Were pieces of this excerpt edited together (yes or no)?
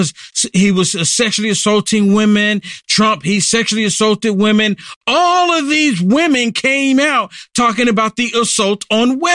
no